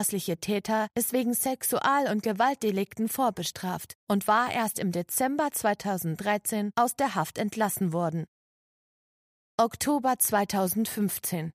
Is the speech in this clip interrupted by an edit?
no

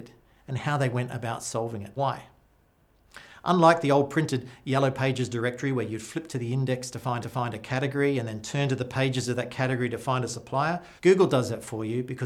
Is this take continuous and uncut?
no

